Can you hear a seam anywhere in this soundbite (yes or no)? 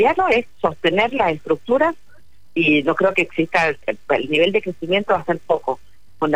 no